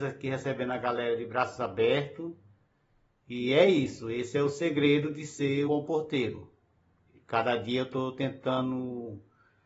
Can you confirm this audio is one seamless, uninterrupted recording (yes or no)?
no